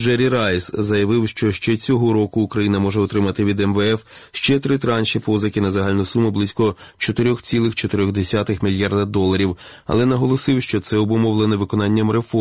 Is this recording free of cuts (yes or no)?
yes